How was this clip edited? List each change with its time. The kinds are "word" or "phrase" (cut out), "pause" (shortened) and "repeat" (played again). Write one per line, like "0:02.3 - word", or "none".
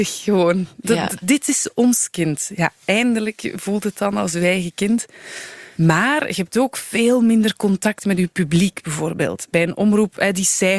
none

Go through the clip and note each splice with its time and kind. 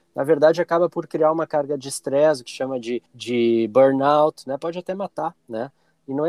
0:02.5 - phrase
0:03.1 - pause
0:05.4 - pause

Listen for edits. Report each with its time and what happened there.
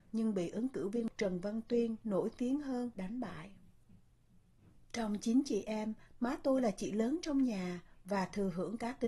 none

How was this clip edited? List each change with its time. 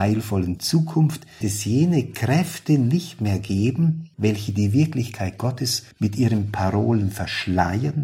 0:01.4 - word
0:04.1 - pause
0:05.9 - pause

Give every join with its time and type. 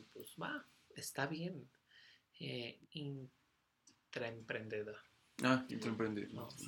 0:02.8 - phrase
0:05.7 - word

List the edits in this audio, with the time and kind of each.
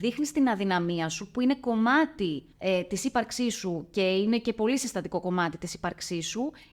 0:02.5 - pause

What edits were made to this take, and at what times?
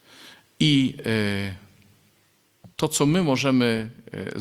0:02.7 - pause

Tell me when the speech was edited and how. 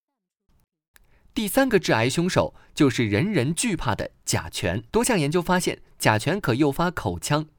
0:04.9 - pause

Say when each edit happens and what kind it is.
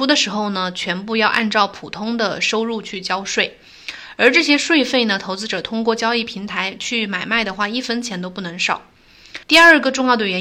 0:09.4 - pause

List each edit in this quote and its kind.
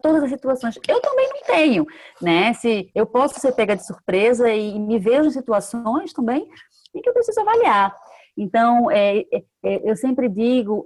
none

